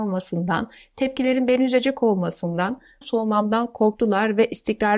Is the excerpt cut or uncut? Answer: cut